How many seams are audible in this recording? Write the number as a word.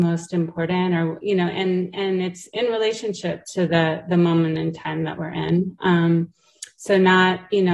zero